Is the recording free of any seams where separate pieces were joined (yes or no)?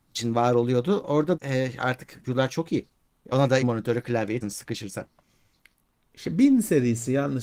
no